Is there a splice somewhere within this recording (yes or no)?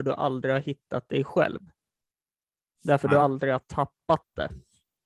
no